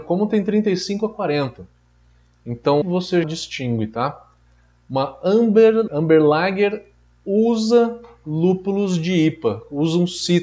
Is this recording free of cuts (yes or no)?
no